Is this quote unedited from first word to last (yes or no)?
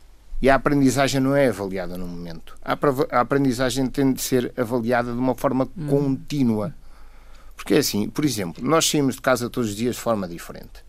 yes